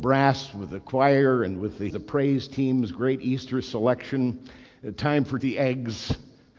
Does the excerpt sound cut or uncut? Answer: cut